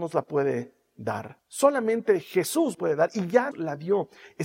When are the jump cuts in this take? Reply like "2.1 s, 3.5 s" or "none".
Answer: 1.4 s, 2.7 s, 3.5 s

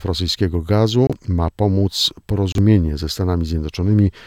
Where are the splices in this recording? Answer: 1.2 s

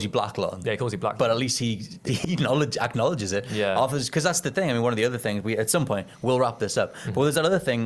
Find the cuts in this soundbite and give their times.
2.1 s

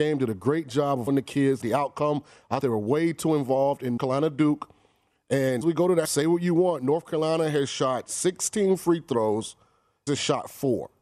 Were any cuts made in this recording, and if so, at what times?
1.1 s, 1.6 s, 2.6 s, 4.0 s, 5.6 s, 6.0 s, 10.1 s

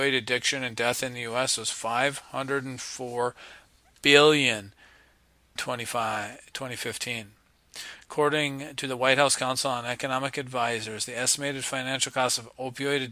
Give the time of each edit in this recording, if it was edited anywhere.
5.6 s

